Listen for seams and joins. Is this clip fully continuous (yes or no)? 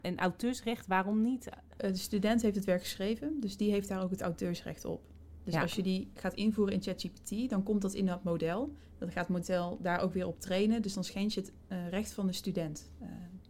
yes